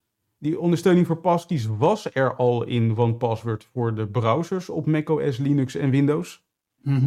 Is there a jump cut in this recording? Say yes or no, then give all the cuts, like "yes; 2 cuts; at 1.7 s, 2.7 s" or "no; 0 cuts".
no; 0 cuts